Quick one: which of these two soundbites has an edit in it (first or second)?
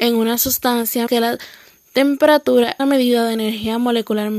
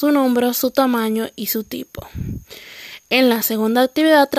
first